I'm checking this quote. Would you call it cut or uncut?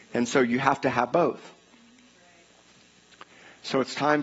cut